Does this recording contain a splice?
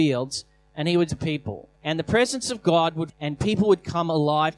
yes; 3 cuts; at 1.1 s, 1.7 s, 3.1 s

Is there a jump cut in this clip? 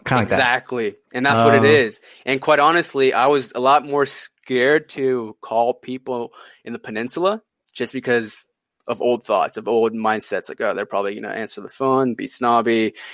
no; 0 cuts

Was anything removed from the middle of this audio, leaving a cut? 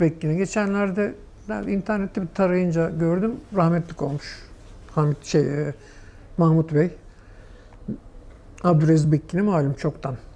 no; 0 cuts

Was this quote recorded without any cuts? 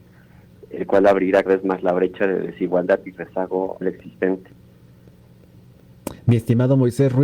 no; 3 cuts; at 1.5 s, 3.8 s, 6.2 s

